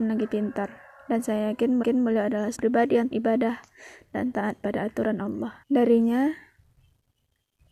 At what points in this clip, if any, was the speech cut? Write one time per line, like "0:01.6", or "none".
0:01.8
0:02.6
0:03.1
0:05.6